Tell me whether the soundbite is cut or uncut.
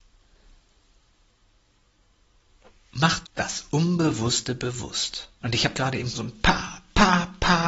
cut